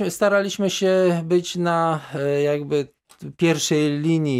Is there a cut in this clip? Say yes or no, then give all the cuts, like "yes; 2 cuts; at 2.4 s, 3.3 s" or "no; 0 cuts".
no; 0 cuts